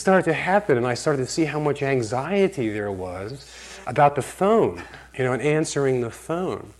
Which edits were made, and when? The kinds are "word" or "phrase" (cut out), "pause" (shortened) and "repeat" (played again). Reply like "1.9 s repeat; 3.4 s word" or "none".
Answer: 3.8 s pause; 5.1 s pause